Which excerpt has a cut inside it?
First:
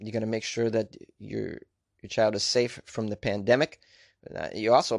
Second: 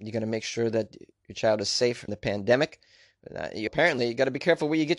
second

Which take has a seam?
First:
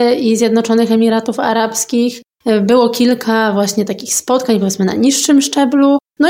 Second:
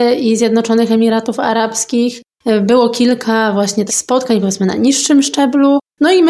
second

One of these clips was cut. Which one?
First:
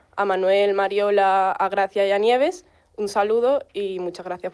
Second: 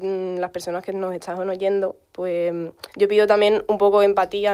second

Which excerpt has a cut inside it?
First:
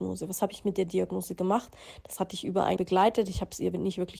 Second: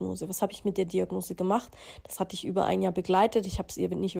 first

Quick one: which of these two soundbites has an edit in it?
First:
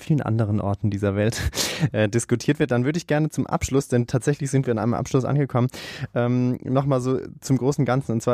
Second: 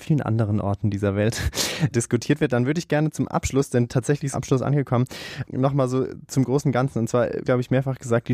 second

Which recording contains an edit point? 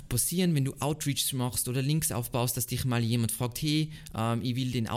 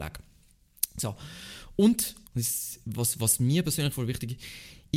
second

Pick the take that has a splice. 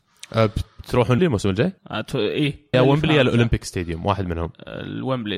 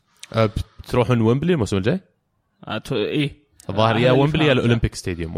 first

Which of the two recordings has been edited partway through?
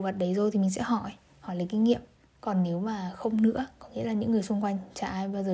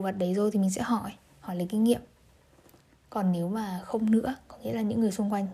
first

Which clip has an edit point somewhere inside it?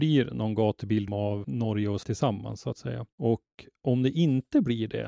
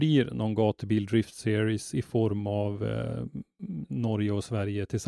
first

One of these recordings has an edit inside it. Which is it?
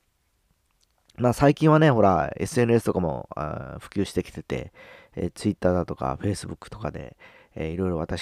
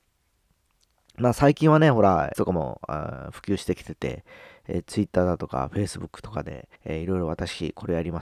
second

